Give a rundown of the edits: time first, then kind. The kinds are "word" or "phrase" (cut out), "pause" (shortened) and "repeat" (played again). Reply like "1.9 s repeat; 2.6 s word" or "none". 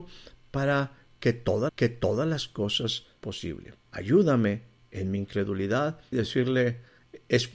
1.7 s repeat; 3.2 s word; 3.8 s pause; 6.1 s word

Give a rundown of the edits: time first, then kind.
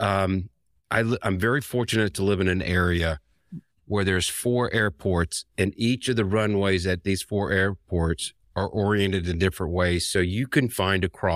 3.7 s pause

